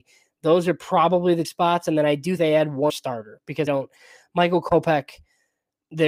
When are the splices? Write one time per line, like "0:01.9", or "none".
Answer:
0:01.4
0:02.4
0:02.9
0:03.7